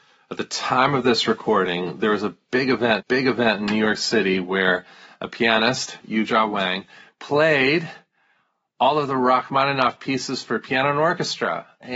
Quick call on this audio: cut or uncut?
cut